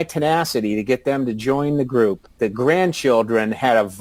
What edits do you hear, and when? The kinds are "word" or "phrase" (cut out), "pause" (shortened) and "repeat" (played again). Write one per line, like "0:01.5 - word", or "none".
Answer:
0:02.4 - word